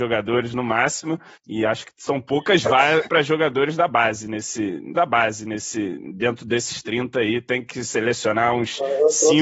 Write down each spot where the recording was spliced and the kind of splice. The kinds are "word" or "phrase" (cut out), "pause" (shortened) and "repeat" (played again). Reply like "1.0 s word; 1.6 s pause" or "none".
1.3 s pause; 3.0 s word; 4.9 s repeat